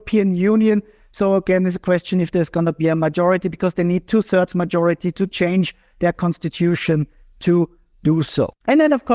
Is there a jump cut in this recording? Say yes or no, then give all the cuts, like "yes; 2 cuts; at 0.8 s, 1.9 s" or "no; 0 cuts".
no; 0 cuts